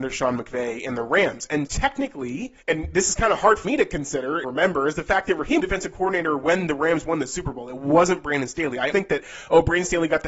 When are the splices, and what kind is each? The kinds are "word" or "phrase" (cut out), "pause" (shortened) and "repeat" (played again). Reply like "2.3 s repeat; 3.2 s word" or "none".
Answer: 1.7 s word; 2.6 s pause; 3.6 s word; 4.4 s word; 5.6 s phrase; 8.9 s word